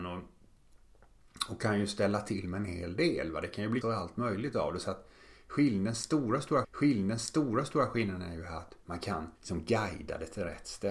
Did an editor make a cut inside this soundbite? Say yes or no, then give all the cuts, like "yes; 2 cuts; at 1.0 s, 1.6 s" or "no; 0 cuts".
yes; 3 cuts; at 3.8 s, 6.6 s, 9.4 s